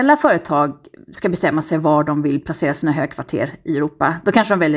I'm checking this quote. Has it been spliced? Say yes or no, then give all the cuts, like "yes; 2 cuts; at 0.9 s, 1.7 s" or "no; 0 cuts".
no; 0 cuts